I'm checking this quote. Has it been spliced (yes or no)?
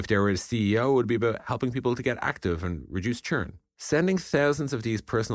yes